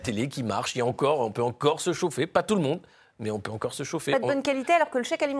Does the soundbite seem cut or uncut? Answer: uncut